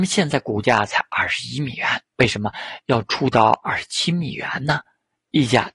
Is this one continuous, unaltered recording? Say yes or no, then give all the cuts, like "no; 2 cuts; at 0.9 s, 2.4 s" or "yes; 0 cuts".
no; 1 cut; at 2.1 s